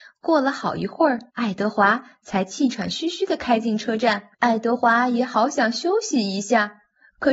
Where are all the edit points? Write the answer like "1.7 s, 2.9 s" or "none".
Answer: 1.3 s, 4.3 s

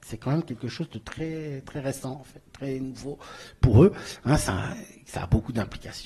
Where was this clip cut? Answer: none

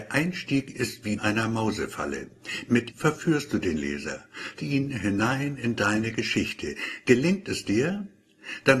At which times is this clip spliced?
1.2 s, 2.9 s, 4.6 s

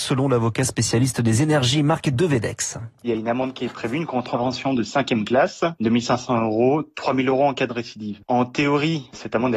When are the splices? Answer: none

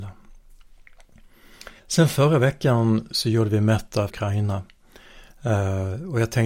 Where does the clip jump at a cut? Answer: 1.8 s, 3.1 s, 4.1 s

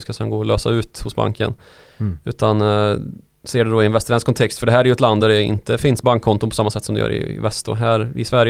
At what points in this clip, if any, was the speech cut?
none

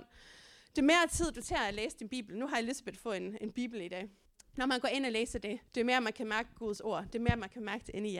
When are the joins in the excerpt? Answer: 4.3 s, 5.7 s

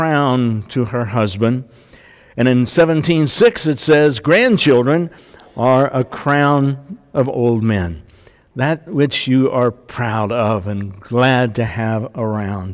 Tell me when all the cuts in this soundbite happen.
none

